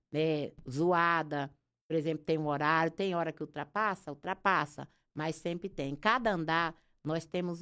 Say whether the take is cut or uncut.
uncut